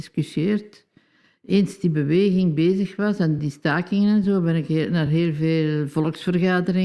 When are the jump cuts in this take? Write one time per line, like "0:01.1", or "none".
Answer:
none